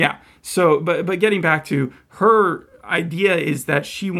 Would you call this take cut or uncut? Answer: uncut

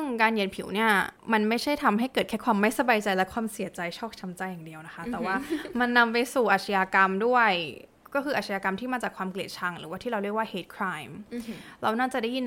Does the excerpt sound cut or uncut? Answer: cut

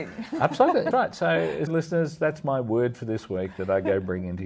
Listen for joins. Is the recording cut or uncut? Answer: cut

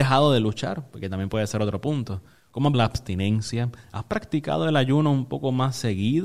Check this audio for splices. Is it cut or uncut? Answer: cut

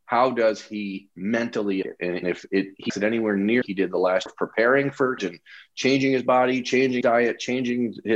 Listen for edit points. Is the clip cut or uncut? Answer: cut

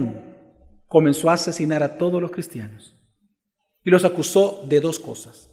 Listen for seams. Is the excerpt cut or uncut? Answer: uncut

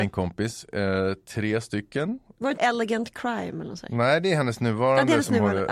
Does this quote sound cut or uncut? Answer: cut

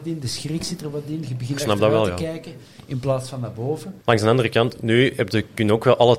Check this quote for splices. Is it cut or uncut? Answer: cut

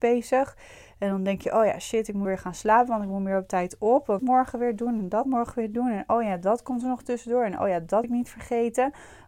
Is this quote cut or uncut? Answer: cut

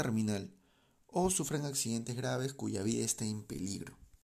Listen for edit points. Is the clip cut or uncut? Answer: uncut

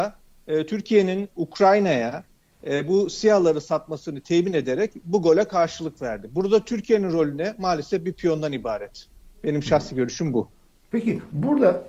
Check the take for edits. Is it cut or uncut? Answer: uncut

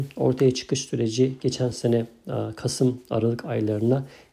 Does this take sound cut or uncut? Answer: uncut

